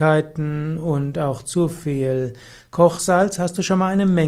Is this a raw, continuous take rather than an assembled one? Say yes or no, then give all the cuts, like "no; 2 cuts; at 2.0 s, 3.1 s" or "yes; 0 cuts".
yes; 0 cuts